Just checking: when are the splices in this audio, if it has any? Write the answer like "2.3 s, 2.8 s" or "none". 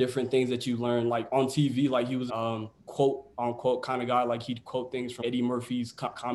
2.3 s, 2.8 s, 5.2 s

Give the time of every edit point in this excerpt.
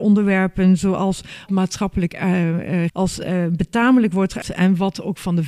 1.5 s, 2.9 s, 4.4 s

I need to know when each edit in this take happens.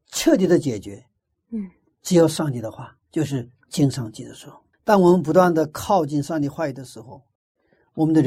4.7 s

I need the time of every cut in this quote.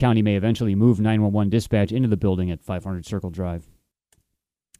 none

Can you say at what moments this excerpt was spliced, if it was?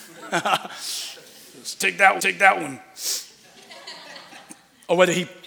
2.2 s

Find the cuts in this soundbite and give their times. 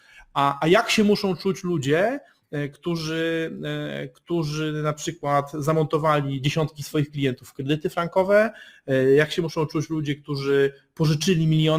none

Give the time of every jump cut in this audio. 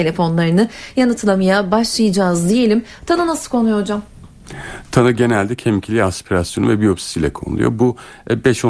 none

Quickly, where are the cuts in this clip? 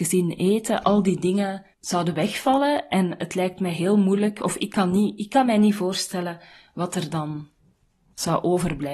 1.7 s

